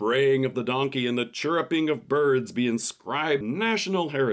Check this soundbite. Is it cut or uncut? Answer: cut